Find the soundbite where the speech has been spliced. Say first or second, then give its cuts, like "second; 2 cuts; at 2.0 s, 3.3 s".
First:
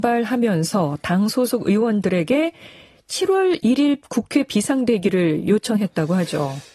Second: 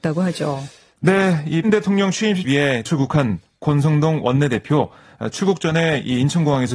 second; 3 cuts; at 1.6 s, 2.4 s, 2.9 s